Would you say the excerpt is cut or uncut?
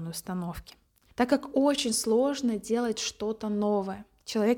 uncut